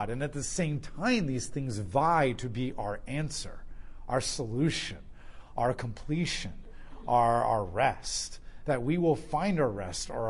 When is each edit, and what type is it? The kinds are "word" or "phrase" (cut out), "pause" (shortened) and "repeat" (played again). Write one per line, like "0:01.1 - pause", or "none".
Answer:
none